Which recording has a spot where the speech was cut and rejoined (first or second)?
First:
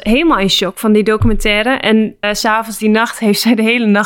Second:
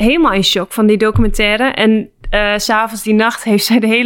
first